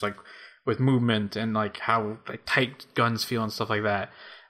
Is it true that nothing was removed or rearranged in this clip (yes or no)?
yes